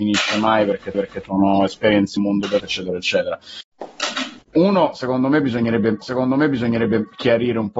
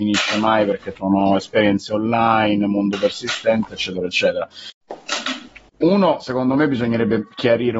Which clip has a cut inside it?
first; 5 cuts; at 0.9 s, 2.2 s, 2.6 s, 4.4 s, 6.0 s

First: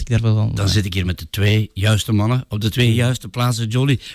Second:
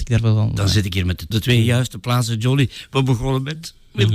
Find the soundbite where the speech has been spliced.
second; 1 cut; at 1.3 s

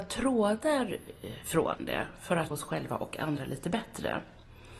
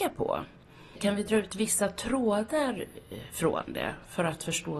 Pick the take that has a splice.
first; 1 cut; at 2.5 s

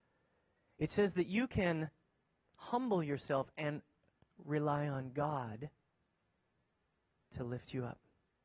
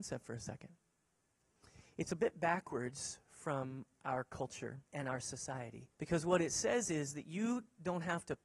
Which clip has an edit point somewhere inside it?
second; 2 cuts; at 4.9 s, 5.9 s

